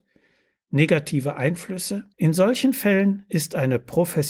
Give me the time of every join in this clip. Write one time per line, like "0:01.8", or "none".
0:02.1